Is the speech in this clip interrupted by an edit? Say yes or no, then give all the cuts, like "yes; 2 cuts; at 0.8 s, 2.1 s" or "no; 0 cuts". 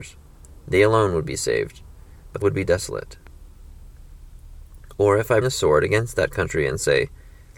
yes; 2 cuts; at 2.4 s, 5.4 s